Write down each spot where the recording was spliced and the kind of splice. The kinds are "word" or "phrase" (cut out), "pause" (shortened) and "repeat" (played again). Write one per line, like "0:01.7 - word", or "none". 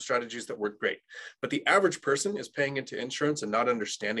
none